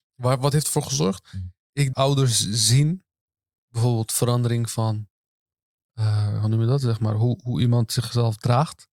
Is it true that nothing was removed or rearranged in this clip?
no; 1 cut; at 1.9 s

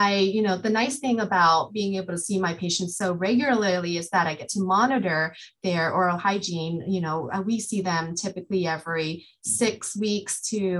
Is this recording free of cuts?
yes; 0 cuts

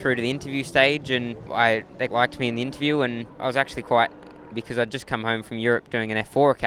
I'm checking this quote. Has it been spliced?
yes; 2 cuts; at 2.1 s, 4.5 s

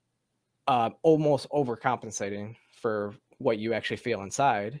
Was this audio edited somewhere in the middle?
no; 0 cuts

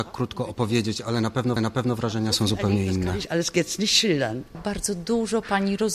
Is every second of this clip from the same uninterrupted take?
no; 1 cut; at 1.6 s

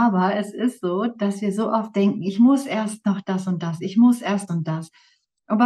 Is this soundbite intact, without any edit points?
no; 1 cut; at 4.5 s

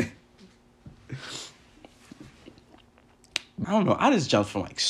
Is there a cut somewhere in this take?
yes; 1 cut; at 3.6 s

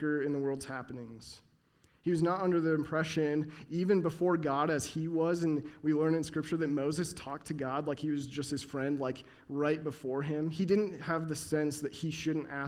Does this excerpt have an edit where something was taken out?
no; 0 cuts

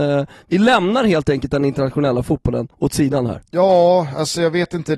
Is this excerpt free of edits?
no; 1 cut; at 2.7 s

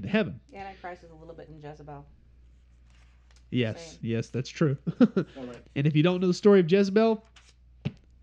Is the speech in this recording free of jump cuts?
no; 3 cuts; at 1.5 s, 4.0 s, 5.6 s

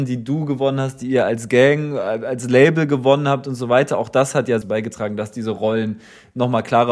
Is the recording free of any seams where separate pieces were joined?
no; 1 cut; at 4.6 s

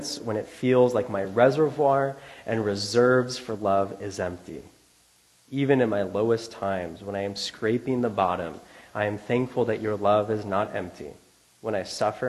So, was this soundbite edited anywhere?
no; 0 cuts

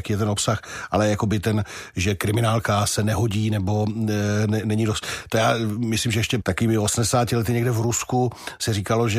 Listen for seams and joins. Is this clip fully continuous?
no; 1 cut; at 6.4 s

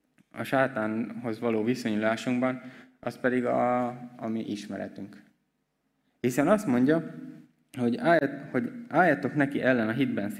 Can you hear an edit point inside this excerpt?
no; 0 cuts

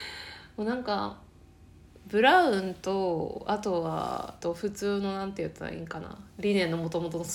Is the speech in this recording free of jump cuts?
no; 1 cut; at 4.4 s

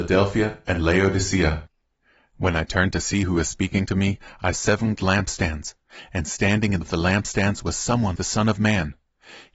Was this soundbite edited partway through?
yes; 4 cuts; at 4.5 s, 5.0 s, 6.8 s, 8.2 s

